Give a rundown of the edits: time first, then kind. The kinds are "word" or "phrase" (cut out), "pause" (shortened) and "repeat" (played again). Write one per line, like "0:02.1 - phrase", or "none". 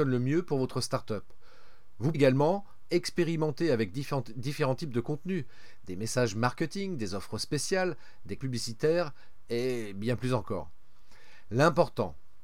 0:02.1 - word
0:08.4 - word